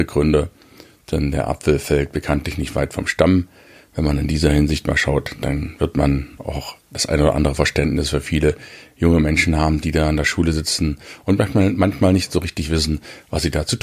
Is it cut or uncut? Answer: uncut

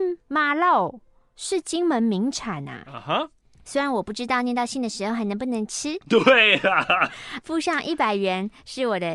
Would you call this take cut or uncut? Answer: cut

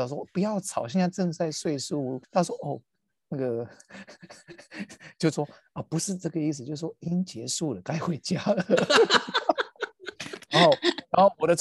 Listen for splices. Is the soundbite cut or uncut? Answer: cut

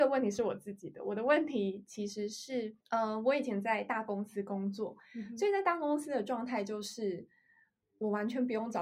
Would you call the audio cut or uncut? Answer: cut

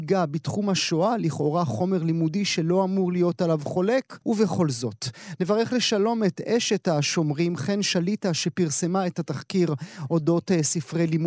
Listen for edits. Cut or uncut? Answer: cut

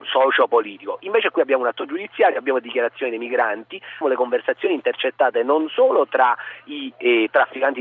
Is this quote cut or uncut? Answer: cut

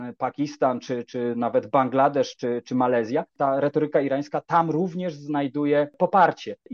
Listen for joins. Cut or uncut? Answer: uncut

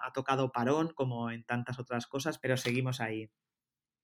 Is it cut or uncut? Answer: cut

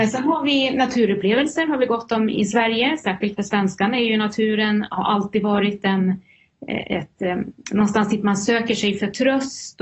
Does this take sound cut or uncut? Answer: uncut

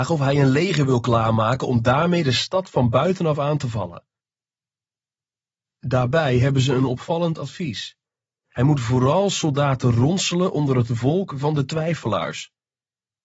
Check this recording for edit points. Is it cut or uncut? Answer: uncut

